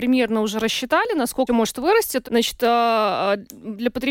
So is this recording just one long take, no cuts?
no; 2 cuts; at 1.5 s, 2.2 s

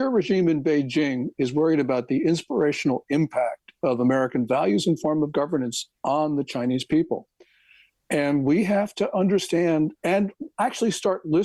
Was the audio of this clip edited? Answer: no; 0 cuts

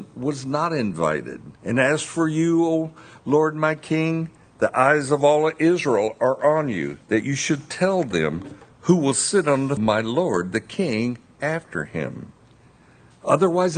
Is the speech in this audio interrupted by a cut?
yes; 3 cuts; at 1.6 s, 7.0 s, 9.8 s

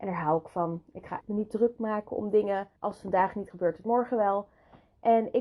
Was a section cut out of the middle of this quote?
yes; 3 cuts; at 1.2 s, 2.8 s, 3.5 s

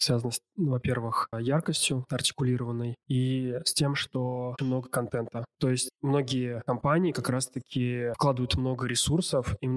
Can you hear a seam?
yes; 3 cuts; at 1.3 s, 2.1 s, 4.6 s

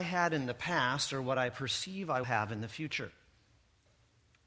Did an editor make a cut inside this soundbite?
yes; 1 cut; at 2.2 s

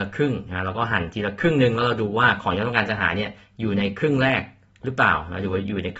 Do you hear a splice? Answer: no; 0 cuts

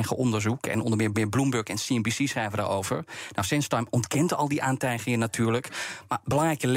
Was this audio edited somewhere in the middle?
yes; 1 cut; at 1.1 s

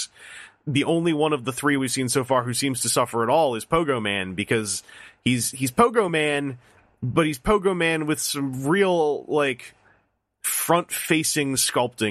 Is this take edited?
no; 0 cuts

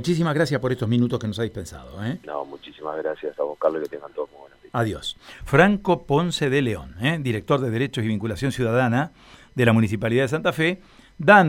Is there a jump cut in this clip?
no; 0 cuts

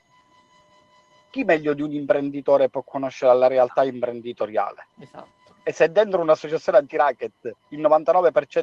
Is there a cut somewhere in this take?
yes; 2 cuts; at 4.9 s, 7.6 s

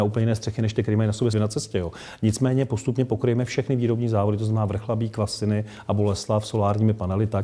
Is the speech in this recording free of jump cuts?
no; 1 cut; at 1.3 s

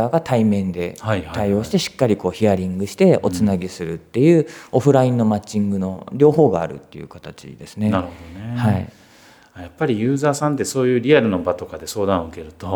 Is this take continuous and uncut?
yes; 0 cuts

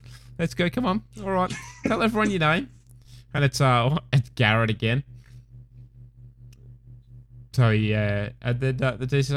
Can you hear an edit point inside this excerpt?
no; 0 cuts

